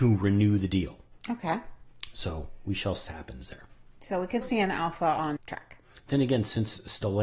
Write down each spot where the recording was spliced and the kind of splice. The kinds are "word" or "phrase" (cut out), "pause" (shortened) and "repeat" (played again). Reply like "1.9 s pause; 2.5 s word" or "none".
3.1 s word; 4.4 s word; 5.4 s word